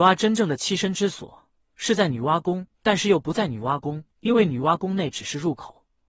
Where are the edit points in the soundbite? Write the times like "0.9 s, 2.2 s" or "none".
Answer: 2.8 s, 4.1 s